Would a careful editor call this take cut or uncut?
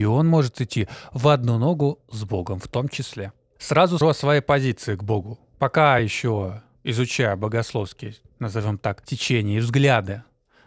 cut